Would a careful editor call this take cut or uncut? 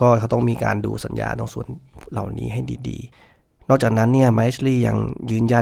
cut